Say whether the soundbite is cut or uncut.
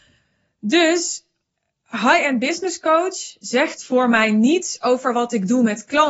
uncut